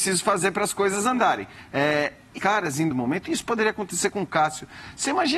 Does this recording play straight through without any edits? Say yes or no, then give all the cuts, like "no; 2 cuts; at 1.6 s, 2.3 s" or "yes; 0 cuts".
no; 2 cuts; at 2.4 s, 2.9 s